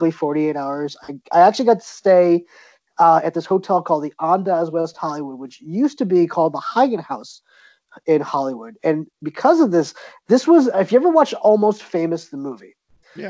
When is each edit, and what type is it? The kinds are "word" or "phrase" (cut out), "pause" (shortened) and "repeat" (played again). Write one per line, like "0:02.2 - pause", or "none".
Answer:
none